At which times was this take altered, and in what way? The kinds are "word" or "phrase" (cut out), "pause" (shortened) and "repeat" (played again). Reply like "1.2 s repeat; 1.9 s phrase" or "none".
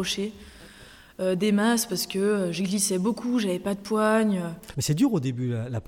none